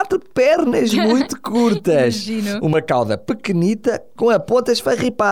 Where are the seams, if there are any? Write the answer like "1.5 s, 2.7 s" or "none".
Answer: none

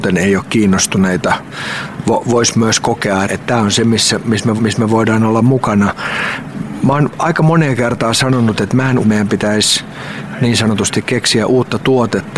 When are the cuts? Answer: 3.2 s, 4.6 s, 9.0 s

